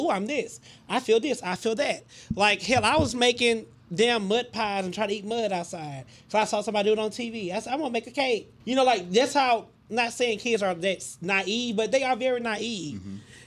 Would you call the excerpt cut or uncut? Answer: cut